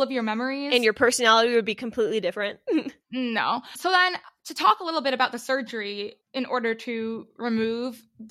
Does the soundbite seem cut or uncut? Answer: uncut